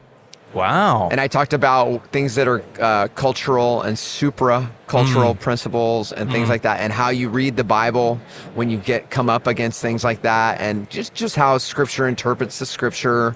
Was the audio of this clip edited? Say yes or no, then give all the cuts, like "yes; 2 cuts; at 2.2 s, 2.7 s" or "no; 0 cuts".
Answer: no; 0 cuts